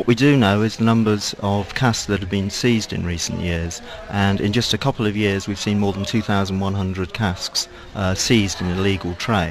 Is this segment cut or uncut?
uncut